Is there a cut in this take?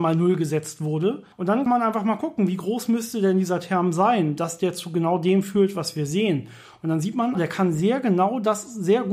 yes; 3 cuts; at 1.3 s, 1.7 s, 7.4 s

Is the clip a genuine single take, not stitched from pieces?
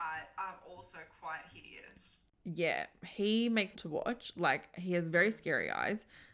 no; 1 cut; at 3.7 s

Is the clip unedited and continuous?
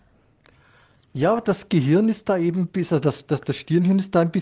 yes; 0 cuts

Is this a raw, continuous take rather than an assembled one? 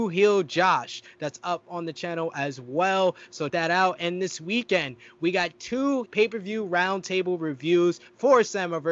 no; 2 cuts; at 3.5 s, 6.1 s

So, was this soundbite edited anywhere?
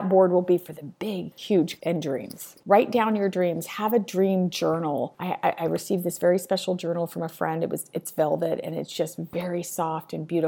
yes; 1 cut; at 1.3 s

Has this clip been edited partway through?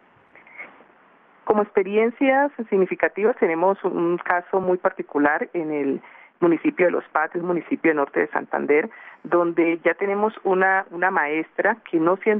no; 0 cuts

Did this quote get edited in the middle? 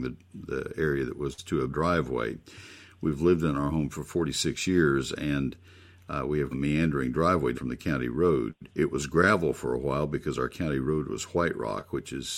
yes; 4 cuts; at 1.7 s, 6.5 s, 7.5 s, 8.7 s

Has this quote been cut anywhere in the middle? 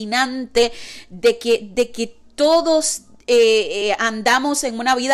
no; 0 cuts

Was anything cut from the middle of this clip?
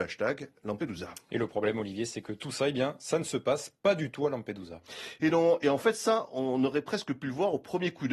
no; 0 cuts

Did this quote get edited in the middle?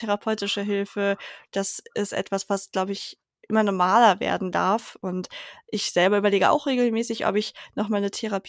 no; 0 cuts

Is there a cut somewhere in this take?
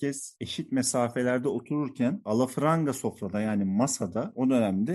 no; 0 cuts

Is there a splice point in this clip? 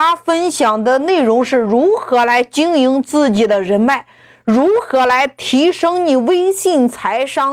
no; 0 cuts

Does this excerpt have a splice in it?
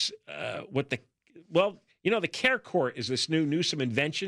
yes; 1 cut; at 1.9 s

